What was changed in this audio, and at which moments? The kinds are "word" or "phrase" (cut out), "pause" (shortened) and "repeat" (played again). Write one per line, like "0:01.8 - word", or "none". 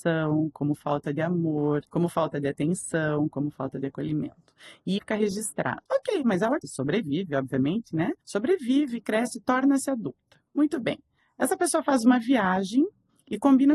0:01.9 - pause
0:05.0 - word
0:05.9 - pause
0:06.6 - word
0:08.2 - pause
0:10.5 - pause
0:11.2 - pause